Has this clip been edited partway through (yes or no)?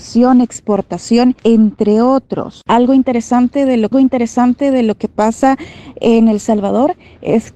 yes